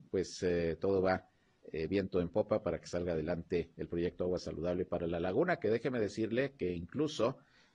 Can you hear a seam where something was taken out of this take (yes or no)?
no